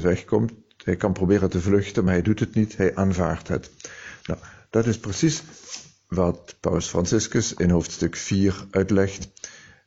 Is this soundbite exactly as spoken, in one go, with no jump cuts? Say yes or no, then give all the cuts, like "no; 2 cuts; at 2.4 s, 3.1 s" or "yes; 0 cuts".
yes; 0 cuts